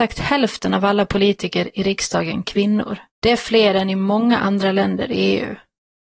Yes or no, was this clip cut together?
yes